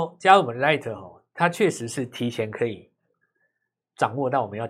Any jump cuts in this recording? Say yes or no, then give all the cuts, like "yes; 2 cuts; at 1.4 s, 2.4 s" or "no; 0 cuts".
no; 0 cuts